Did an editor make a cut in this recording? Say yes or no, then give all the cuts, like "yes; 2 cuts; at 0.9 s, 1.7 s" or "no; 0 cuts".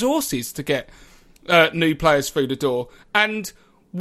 no; 0 cuts